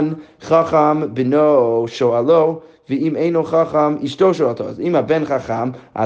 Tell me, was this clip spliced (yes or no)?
no